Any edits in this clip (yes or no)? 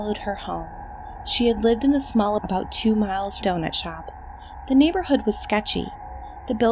yes